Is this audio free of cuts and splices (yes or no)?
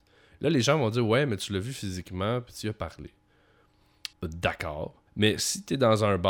no